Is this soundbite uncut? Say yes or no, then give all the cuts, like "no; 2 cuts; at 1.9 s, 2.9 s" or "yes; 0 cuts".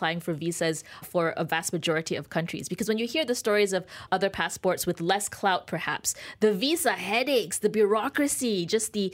no; 2 cuts; at 1.0 s, 4.1 s